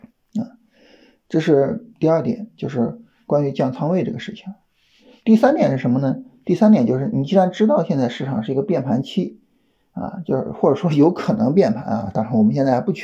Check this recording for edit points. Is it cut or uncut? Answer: uncut